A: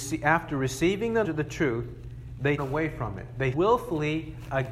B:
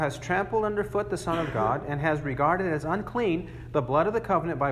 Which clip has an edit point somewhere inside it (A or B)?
A